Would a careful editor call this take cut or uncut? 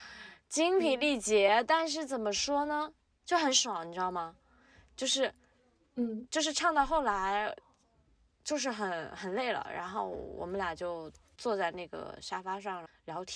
uncut